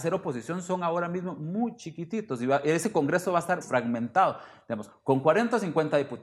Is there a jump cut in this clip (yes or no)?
yes